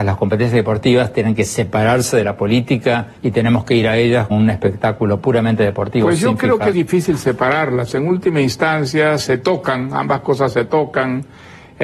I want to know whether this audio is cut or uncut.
cut